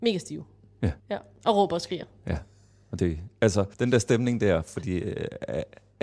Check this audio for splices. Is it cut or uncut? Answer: cut